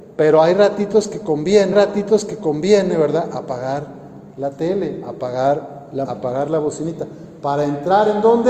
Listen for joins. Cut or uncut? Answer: cut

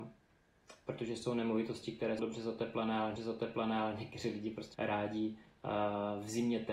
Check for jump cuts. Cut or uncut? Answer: cut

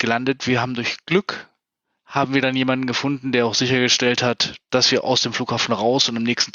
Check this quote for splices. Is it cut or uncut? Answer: uncut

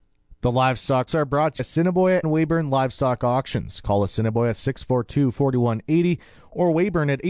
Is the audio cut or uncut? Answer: cut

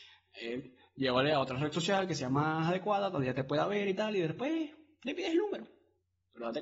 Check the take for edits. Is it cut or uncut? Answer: uncut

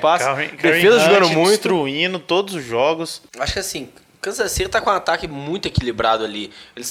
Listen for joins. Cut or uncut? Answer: uncut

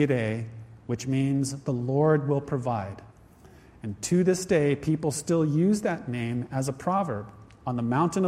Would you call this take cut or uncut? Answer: uncut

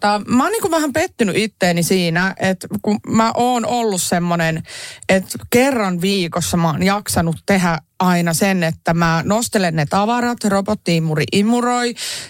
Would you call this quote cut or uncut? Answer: uncut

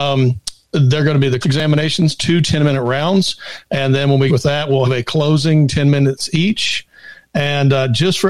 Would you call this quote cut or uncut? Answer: cut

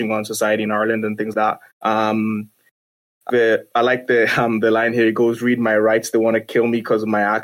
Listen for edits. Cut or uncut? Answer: cut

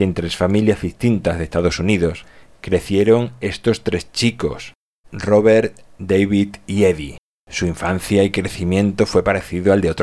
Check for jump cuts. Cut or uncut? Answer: cut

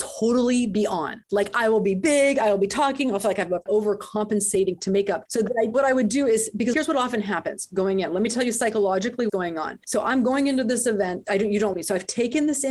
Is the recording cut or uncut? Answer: cut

